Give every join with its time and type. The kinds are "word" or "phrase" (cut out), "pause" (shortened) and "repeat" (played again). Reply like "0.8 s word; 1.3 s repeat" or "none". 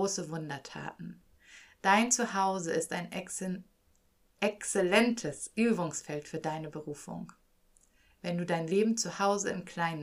none